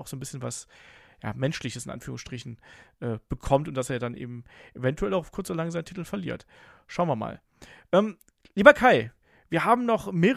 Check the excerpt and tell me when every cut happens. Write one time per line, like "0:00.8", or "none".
none